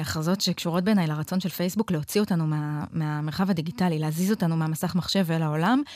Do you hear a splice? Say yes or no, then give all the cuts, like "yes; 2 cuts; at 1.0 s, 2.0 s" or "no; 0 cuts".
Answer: no; 0 cuts